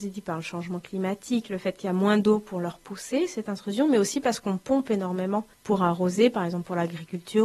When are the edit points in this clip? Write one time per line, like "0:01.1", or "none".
0:05.5